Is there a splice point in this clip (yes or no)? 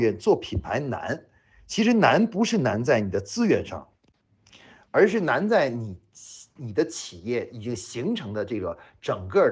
no